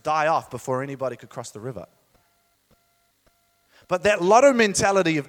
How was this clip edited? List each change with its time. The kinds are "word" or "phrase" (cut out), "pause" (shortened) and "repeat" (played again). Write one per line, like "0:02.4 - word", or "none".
none